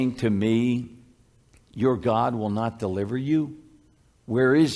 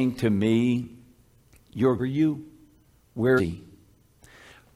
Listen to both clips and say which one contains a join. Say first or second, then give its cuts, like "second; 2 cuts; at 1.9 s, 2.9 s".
second; 2 cuts; at 2.0 s, 3.4 s